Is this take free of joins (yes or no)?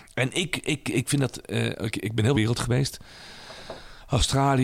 no